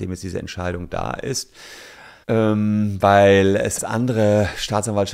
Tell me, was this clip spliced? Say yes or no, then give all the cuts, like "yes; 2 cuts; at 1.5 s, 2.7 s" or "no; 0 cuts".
yes; 2 cuts; at 2.2 s, 3.8 s